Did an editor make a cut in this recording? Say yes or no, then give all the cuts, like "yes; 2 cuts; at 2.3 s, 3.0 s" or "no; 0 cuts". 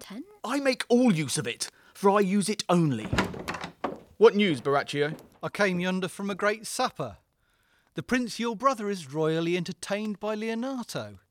no; 0 cuts